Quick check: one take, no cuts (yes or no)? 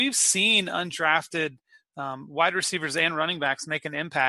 yes